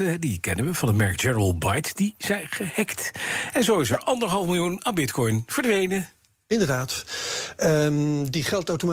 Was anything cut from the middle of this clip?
yes; 1 cut; at 6.3 s

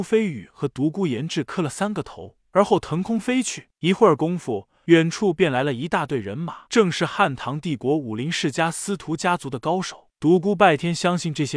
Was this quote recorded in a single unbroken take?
no; 1 cut; at 6.6 s

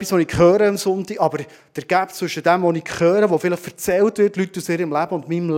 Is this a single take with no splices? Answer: yes; 0 cuts

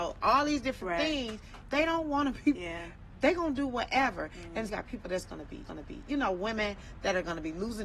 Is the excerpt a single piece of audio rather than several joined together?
no; 4 cuts; at 1.6 s, 2.5 s, 4.7 s, 5.6 s

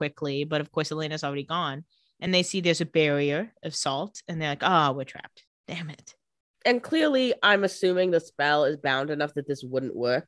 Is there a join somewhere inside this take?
no; 0 cuts

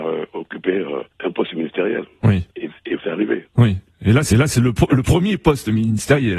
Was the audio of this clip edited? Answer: yes; 4 cuts; at 1.1 s, 2.5 s, 3.0 s, 4.3 s

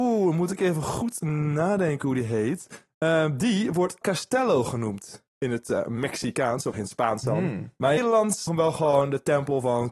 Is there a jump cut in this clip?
yes; 5 cuts; at 4.0 s, 5.3 s, 6.7 s, 8.0 s, 8.5 s

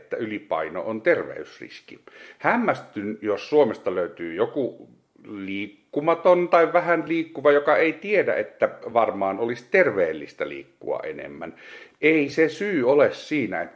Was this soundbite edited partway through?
no; 0 cuts

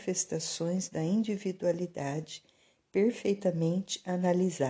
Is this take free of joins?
yes; 0 cuts

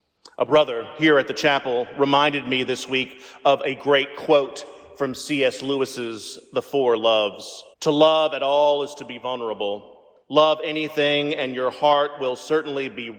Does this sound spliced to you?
yes; 2 cuts; at 7.7 s, 10.2 s

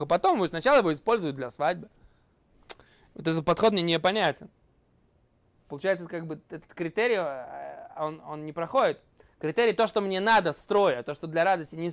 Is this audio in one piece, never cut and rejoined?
yes; 0 cuts

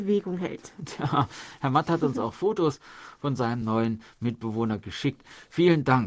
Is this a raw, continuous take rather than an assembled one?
yes; 0 cuts

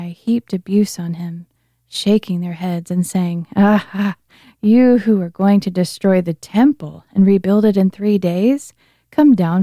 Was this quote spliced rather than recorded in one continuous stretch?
no; 0 cuts

